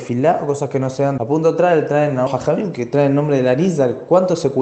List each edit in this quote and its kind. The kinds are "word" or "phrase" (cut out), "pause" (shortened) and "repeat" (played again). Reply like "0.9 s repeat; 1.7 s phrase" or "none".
1.2 s phrase; 2.3 s word